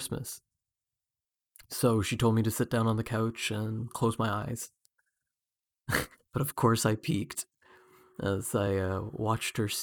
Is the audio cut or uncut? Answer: uncut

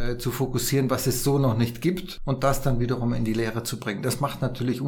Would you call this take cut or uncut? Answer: uncut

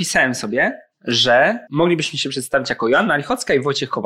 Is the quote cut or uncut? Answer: cut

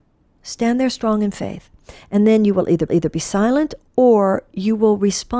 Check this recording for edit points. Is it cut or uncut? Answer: cut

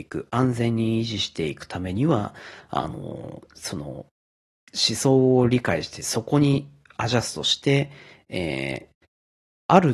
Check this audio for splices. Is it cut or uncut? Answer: uncut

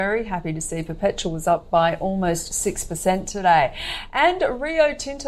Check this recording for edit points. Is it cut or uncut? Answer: uncut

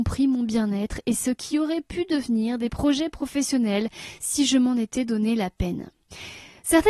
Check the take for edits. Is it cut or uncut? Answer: uncut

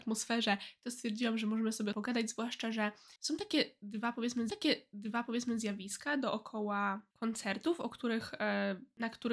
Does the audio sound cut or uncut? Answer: cut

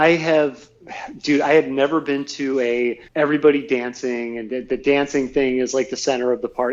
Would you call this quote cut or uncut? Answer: cut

